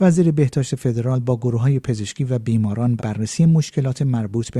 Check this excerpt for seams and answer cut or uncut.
cut